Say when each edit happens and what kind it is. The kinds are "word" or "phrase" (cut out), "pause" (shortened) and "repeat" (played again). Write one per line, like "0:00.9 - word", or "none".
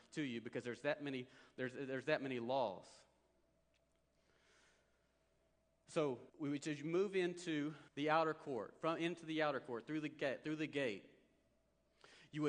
0:06.3 - pause
0:07.9 - pause